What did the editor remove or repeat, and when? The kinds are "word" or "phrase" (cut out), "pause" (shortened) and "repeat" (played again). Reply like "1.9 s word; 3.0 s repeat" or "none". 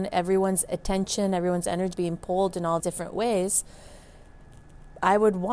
1.9 s word; 2.8 s word